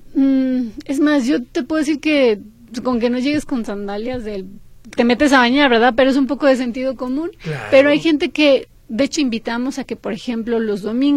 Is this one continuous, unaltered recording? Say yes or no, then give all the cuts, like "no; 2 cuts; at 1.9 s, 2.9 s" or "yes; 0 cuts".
no; 2 cuts; at 5.0 s, 9.2 s